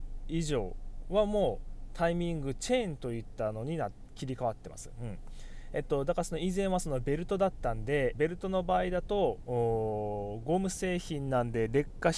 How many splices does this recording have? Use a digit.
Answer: 1